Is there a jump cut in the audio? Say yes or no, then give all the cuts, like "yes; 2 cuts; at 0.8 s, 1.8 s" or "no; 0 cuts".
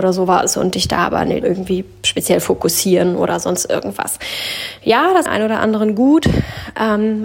yes; 2 cuts; at 1.4 s, 5.3 s